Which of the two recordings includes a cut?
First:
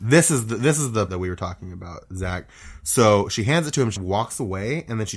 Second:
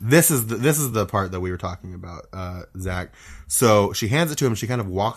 first; 3 cuts; at 1.1 s, 2.0 s, 4.0 s

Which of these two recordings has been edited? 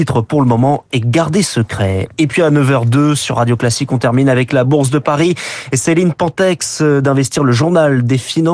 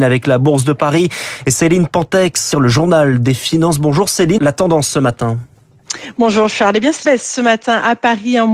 second; 3 cuts; at 2.5 s, 4.4 s, 7.0 s

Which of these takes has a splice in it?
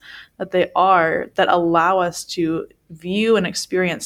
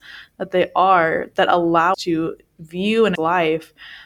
second; 2 cuts; at 1.9 s, 3.1 s

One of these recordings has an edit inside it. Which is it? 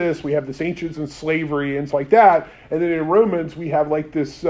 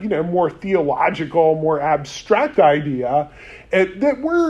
first; 2 cuts; at 0.9 s, 1.9 s

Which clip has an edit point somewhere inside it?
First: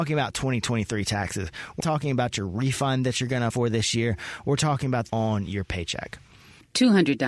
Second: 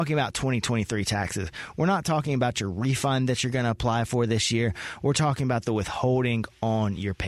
first; 3 cuts; at 1.8 s, 3.5 s, 5.1 s

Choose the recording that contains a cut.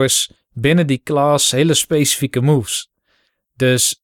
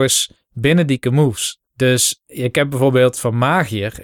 second; 3 cuts; at 1.0 s, 1.7 s, 3.1 s

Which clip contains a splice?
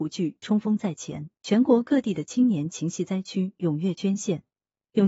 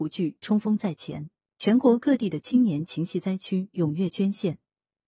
first; 1 cut; at 1.3 s

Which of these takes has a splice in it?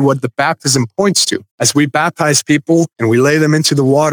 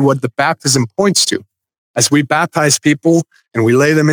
first; 2 cuts; at 1.5 s, 2.9 s

